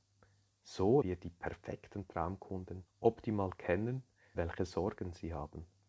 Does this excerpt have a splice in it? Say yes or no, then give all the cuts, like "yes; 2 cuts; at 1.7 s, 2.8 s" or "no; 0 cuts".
yes; 3 cuts; at 1.0 s, 2.9 s, 4.3 s